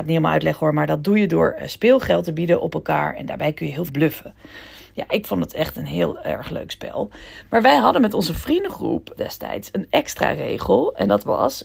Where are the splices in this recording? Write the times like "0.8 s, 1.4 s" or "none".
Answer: 3.9 s, 9.2 s